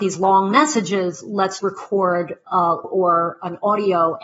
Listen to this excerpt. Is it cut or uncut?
cut